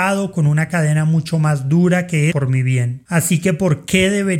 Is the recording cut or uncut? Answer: cut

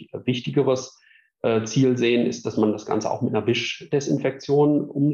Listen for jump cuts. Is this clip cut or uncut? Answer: uncut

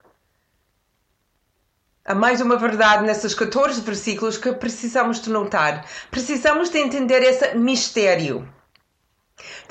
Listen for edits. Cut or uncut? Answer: uncut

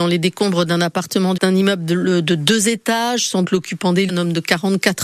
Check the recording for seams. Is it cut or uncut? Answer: cut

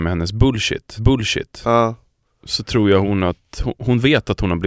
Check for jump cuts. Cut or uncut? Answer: cut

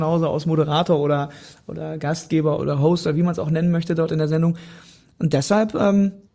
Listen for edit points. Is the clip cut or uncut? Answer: cut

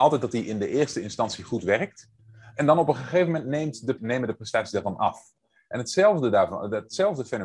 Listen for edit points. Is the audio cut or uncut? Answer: cut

